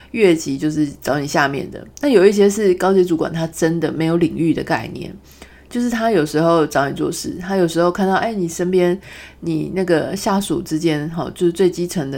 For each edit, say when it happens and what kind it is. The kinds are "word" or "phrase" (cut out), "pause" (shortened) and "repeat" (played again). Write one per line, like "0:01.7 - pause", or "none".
none